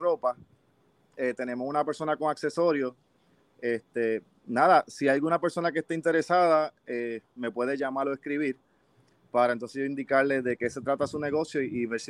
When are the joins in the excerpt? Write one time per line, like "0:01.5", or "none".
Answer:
none